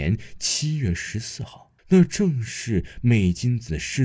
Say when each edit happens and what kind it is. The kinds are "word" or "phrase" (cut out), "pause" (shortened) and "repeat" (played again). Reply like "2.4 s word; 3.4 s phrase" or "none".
1.8 s pause